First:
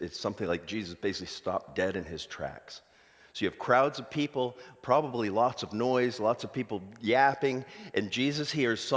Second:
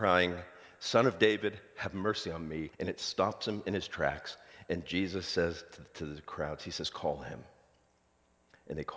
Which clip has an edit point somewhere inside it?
second; 1 cut; at 2.7 s

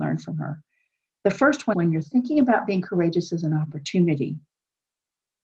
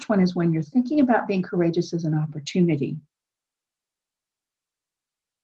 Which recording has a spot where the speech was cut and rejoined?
first; 1 cut; at 1.7 s

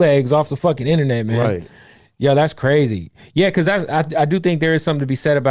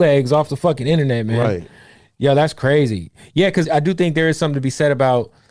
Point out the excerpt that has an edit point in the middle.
second; 1 cut; at 3.6 s

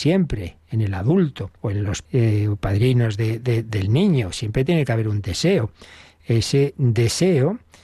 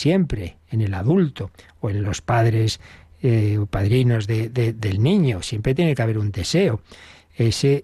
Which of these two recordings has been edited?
first; 2 cuts; at 1.6 s, 2.0 s

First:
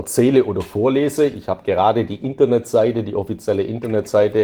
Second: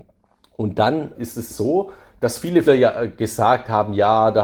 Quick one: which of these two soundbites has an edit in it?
second; 3 cuts; at 1.1 s, 1.5 s, 2.6 s

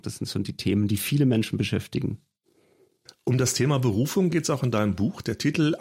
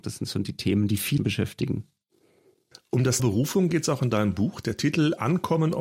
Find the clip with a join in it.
second; 2 cuts; at 1.2 s, 3.2 s

